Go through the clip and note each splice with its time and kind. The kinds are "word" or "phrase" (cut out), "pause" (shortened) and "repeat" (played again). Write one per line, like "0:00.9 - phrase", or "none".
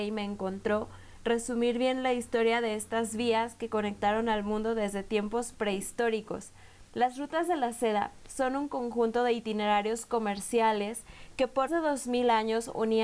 0:06.9 - pause
0:11.7 - word